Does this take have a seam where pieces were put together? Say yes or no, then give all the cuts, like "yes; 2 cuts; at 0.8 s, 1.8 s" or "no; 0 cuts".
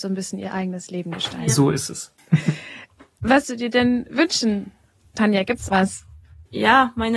yes; 2 cuts; at 3.4 s, 5.7 s